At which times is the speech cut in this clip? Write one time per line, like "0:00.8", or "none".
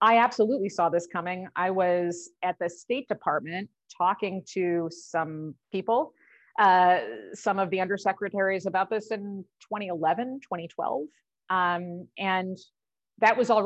0:05.6